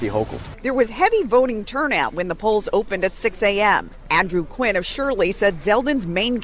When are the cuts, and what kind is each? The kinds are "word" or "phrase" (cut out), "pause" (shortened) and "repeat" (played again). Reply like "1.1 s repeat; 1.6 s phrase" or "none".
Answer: none